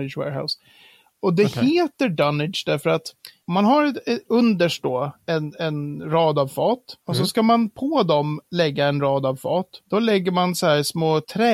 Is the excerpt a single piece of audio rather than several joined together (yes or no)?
yes